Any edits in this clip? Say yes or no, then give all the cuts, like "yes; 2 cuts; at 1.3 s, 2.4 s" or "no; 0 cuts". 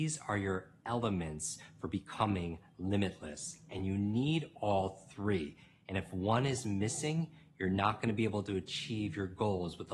no; 0 cuts